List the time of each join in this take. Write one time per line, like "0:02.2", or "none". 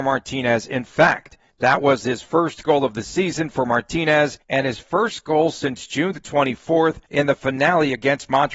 0:01.5
0:04.4
0:07.1